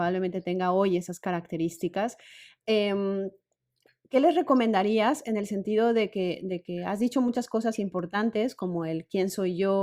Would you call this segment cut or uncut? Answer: uncut